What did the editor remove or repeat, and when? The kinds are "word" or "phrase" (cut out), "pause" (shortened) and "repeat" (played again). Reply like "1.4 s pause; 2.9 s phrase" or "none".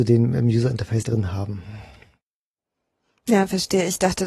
1.0 s word